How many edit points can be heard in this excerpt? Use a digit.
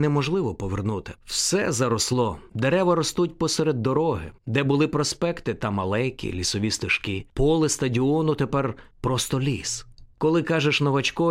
4